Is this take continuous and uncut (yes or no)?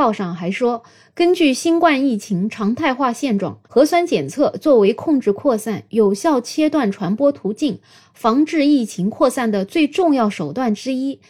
no